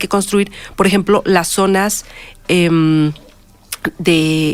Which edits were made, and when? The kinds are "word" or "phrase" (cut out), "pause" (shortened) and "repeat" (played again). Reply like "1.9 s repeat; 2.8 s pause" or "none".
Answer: none